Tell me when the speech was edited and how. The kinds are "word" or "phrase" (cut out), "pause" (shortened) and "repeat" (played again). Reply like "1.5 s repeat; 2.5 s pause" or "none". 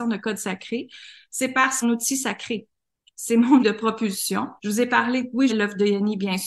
1.8 s phrase; 3.6 s word; 4.6 s pause; 5.5 s word